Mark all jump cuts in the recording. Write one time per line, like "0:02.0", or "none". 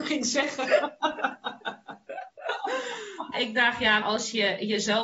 0:03.3
0:04.0